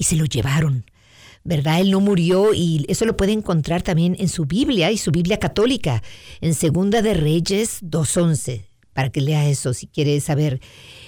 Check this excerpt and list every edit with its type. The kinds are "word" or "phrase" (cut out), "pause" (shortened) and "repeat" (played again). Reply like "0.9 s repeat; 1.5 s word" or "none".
none